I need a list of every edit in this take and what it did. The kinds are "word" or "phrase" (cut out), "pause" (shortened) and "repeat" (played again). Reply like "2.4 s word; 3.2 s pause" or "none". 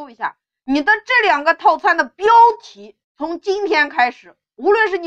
3.0 s pause